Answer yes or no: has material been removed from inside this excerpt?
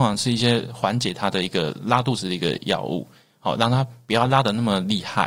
no